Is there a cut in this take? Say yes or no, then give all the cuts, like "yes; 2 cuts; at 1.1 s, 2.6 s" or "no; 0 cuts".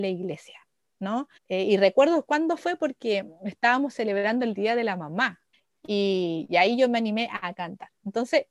yes; 2 cuts; at 1.4 s, 5.5 s